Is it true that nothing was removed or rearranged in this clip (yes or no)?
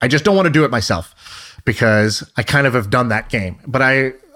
yes